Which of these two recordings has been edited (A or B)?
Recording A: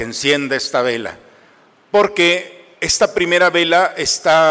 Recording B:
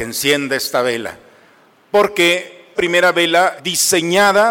B